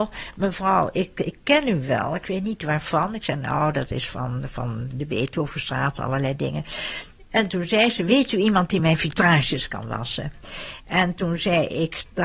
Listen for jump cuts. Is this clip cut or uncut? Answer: uncut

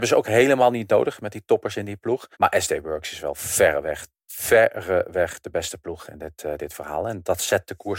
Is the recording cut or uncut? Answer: cut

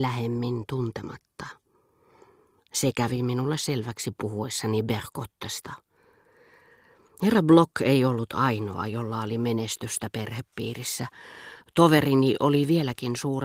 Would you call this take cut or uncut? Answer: uncut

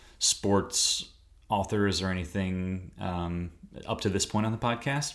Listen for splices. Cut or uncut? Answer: uncut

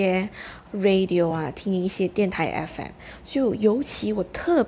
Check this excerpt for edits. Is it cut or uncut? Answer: uncut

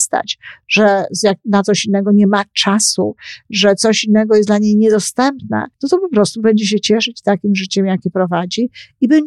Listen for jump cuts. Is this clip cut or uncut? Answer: cut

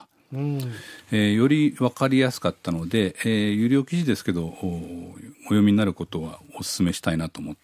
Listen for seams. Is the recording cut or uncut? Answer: cut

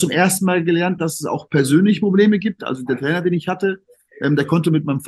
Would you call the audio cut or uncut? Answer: uncut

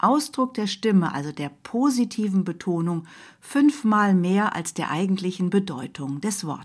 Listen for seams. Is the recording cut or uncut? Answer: uncut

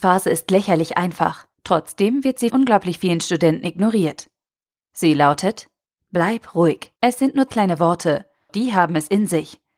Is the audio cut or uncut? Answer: cut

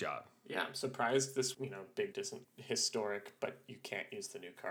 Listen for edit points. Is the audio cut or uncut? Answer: cut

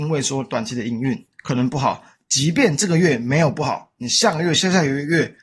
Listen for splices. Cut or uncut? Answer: uncut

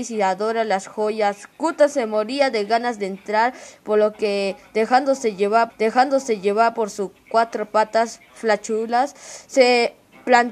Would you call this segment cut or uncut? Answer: cut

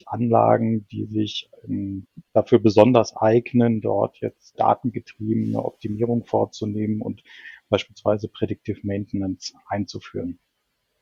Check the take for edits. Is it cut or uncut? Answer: cut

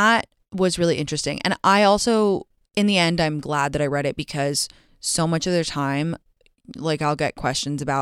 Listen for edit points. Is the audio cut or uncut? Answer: uncut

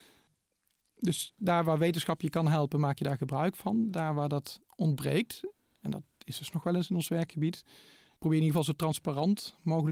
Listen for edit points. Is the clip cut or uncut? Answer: cut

